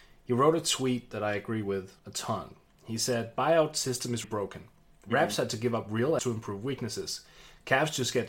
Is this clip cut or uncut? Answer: cut